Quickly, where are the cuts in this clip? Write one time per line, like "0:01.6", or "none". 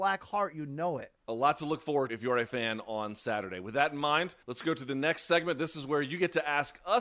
0:01.2
0:02.1
0:02.5
0:04.4